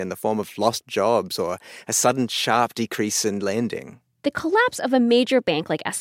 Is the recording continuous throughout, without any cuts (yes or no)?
no